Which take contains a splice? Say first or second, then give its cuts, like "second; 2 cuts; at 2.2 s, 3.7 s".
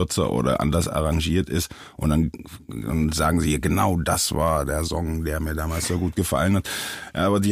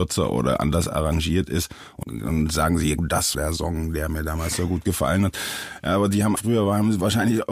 second; 4 cuts; at 2.0 s, 3.0 s, 3.3 s, 6.4 s